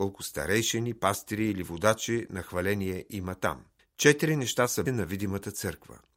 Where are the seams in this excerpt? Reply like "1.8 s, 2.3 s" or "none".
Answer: 3.8 s, 4.9 s